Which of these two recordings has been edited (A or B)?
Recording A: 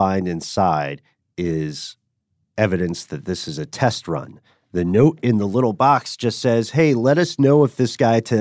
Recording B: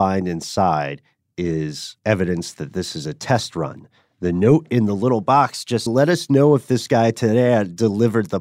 B